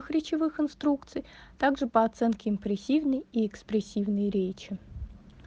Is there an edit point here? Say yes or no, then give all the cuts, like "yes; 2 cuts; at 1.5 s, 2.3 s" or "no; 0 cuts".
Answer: no; 0 cuts